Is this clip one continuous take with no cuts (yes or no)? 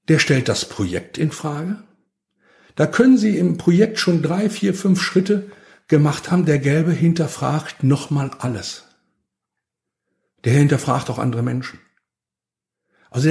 yes